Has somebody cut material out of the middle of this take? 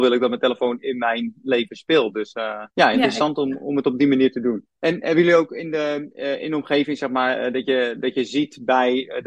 yes; 2 cuts; at 2.7 s, 4.8 s

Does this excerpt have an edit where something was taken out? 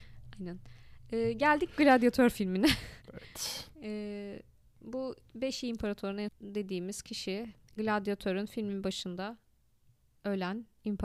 yes; 4 cuts; at 3.0 s, 4.7 s, 6.3 s, 7.6 s

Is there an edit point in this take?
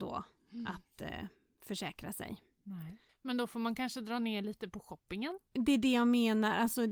no; 0 cuts

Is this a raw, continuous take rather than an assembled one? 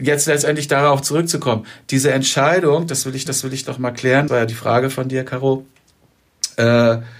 no; 2 cuts; at 3.3 s, 4.3 s

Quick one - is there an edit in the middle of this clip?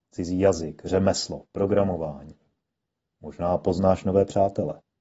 no; 0 cuts

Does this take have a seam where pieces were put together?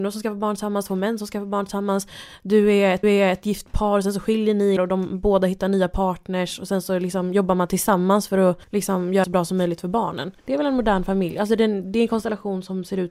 yes; 5 cuts; at 3.0 s, 4.8 s, 8.6 s, 9.2 s, 10.4 s

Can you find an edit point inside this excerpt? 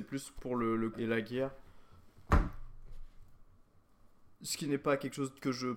yes; 1 cut; at 0.9 s

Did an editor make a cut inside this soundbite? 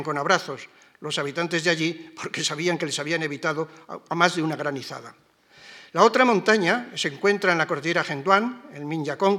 no; 0 cuts

